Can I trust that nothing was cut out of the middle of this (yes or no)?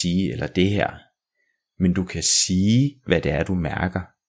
yes